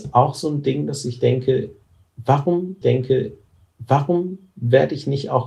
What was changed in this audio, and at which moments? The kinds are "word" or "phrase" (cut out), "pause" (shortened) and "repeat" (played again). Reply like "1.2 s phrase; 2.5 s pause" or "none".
2.8 s repeat